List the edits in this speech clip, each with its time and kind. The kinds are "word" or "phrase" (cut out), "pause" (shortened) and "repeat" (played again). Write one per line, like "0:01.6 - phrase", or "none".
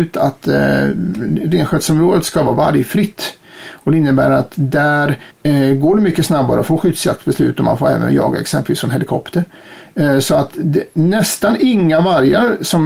0:05.3 - pause